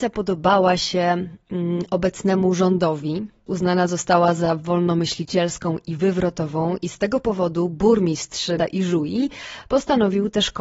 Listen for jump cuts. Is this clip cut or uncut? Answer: cut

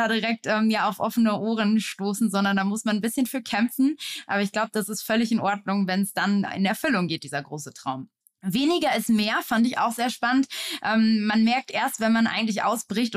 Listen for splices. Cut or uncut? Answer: cut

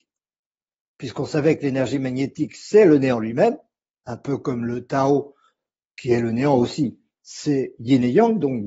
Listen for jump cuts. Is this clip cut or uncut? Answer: uncut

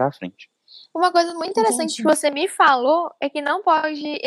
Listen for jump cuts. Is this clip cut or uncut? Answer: uncut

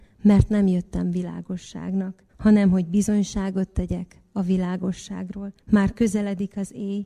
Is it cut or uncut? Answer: cut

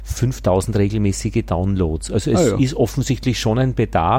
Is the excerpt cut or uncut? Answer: uncut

